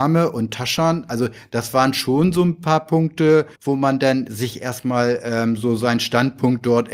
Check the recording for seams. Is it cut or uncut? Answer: cut